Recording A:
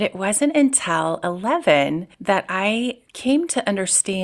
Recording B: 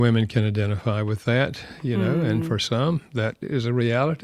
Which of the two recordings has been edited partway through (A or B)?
A